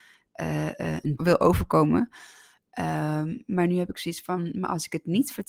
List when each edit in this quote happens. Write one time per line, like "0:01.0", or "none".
0:01.2